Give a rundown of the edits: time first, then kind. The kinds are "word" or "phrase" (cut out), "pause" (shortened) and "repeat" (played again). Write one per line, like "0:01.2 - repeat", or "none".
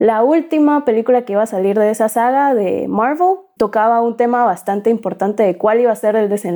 0:03.6 - word